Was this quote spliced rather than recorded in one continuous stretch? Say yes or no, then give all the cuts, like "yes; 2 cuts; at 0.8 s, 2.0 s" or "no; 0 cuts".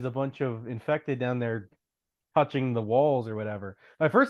no; 0 cuts